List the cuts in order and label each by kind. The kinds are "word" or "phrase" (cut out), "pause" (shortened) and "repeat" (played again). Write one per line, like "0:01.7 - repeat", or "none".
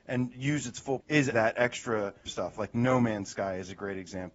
0:01.0 - word
0:01.3 - word
0:02.3 - word